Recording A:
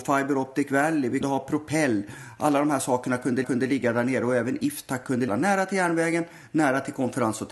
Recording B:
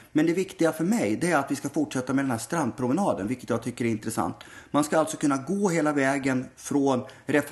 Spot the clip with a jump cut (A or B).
A